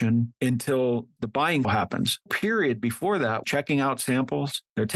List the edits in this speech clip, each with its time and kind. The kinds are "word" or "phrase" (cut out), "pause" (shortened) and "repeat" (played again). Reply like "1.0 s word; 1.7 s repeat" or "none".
1.2 s word; 1.6 s word; 2.3 s phrase; 3.4 s phrase